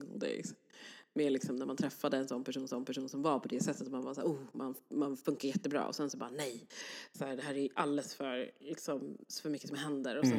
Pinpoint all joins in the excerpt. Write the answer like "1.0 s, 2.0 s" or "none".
2.7 s